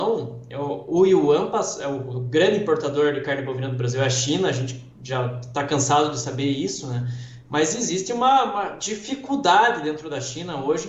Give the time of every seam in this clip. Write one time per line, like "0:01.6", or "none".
none